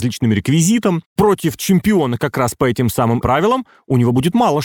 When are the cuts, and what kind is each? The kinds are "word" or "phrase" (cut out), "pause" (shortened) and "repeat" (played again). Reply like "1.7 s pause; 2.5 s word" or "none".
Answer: 3.2 s word